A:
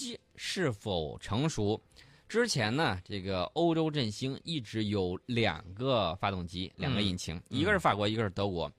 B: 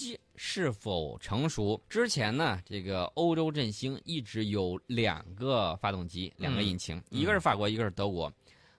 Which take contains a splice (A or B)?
B